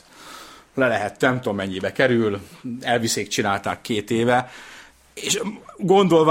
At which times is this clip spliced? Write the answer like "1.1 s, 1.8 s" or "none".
none